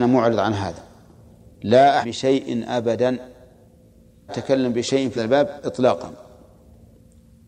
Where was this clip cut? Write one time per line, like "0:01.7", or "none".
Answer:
0:02.0
0:04.3
0:05.2